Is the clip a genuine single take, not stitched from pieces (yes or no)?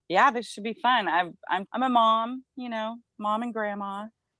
no